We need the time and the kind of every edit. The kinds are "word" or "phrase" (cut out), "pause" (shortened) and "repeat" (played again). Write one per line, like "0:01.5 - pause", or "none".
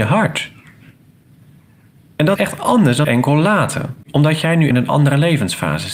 0:02.4 - word
0:03.0 - word
0:04.7 - word